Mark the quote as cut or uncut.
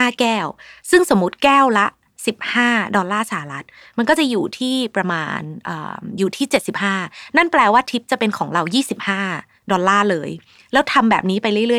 cut